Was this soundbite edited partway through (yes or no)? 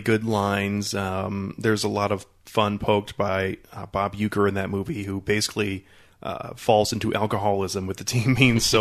no